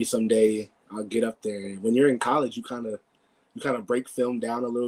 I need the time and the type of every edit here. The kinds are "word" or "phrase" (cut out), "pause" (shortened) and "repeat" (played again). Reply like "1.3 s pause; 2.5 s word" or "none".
none